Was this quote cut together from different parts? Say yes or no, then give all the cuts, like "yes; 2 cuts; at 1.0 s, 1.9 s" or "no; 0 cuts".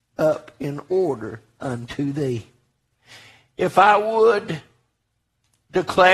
no; 0 cuts